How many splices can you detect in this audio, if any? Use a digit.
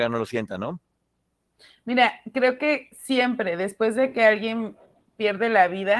0